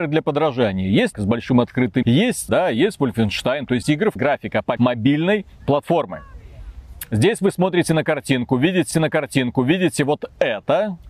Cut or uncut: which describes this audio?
cut